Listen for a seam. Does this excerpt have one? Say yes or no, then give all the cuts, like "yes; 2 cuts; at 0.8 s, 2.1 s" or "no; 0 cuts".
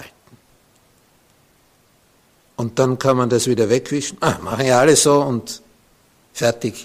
no; 0 cuts